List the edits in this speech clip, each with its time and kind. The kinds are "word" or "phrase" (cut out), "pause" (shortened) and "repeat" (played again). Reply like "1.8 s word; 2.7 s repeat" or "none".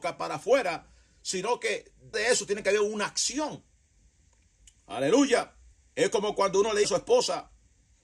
2.1 s word; 5.7 s pause; 6.8 s word